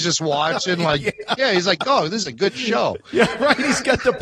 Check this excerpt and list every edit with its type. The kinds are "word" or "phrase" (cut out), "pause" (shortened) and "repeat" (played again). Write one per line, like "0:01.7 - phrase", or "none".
none

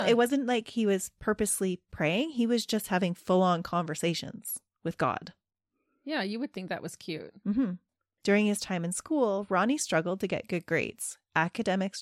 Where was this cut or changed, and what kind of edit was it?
none

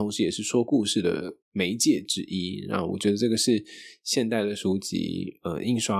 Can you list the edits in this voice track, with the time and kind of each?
0:01.4 - pause

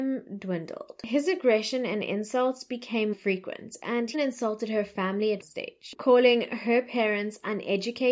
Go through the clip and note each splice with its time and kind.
0:03.1 - word
0:04.1 - word
0:05.4 - word

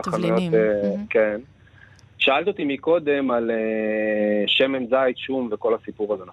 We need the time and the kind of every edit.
none

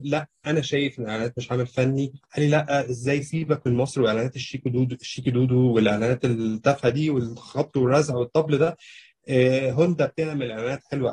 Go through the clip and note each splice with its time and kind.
none

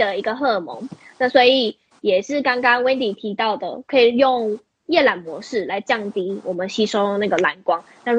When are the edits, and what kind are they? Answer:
none

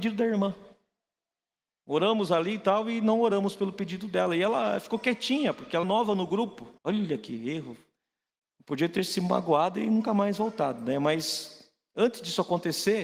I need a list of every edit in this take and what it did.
0:05.8 - word
0:06.8 - pause
0:08.3 - pause

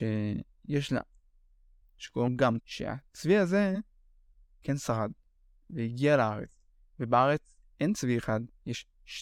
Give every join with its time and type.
0:01.8 - word
0:02.3 - word
0:02.6 - word
0:04.6 - word

